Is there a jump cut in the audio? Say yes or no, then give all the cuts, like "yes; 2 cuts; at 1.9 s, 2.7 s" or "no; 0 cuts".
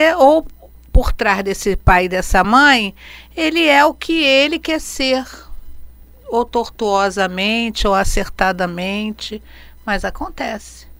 no; 0 cuts